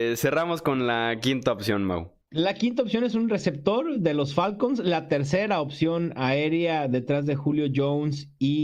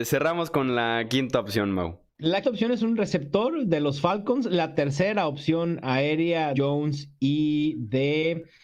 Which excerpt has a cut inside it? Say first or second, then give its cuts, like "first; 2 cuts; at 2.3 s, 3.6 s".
second; 2 cuts; at 2.4 s, 6.5 s